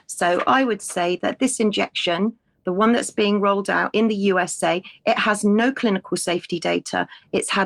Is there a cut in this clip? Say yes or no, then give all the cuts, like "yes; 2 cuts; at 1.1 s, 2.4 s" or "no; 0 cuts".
no; 0 cuts